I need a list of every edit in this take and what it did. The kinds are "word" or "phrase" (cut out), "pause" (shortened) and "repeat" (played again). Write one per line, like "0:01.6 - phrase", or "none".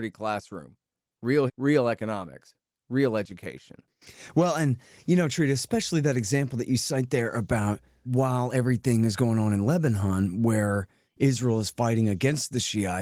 0:01.5 - word
0:08.1 - word